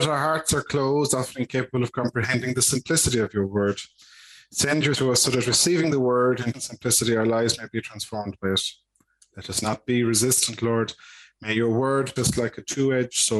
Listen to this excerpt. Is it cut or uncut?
cut